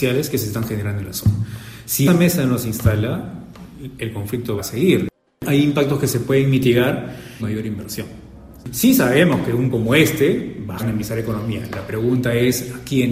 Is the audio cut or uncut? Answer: cut